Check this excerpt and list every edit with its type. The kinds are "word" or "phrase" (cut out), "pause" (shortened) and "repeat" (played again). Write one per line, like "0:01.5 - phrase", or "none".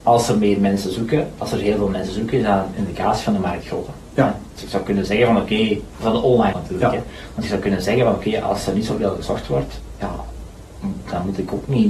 0:06.5 - word